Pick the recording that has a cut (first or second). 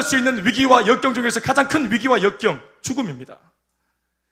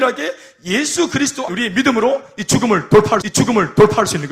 second